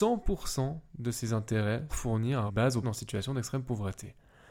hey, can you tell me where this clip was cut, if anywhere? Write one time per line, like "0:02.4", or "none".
0:01.9
0:02.5
0:02.8